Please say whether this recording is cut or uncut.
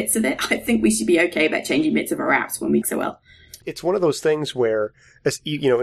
cut